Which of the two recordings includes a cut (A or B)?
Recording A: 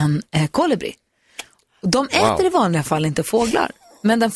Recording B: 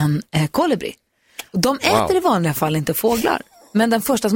B